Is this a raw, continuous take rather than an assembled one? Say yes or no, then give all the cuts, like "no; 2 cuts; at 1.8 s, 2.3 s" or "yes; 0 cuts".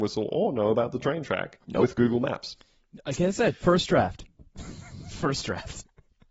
no; 1 cut; at 1.6 s